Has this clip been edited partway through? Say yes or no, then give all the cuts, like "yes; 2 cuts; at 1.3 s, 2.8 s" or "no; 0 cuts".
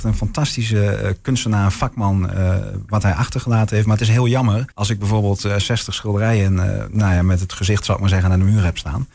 yes; 1 cut; at 4.7 s